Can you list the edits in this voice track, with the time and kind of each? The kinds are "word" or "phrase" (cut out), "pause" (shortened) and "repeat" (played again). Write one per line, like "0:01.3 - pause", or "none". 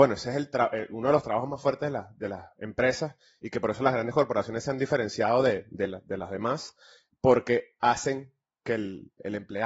none